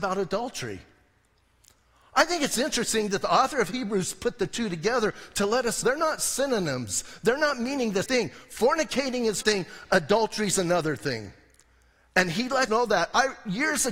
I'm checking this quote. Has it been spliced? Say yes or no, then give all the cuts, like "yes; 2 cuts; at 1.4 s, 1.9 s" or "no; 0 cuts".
yes; 4 cuts; at 5.8 s, 8.0 s, 9.4 s, 12.7 s